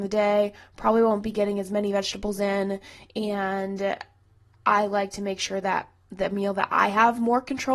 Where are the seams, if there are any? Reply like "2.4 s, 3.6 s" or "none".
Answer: none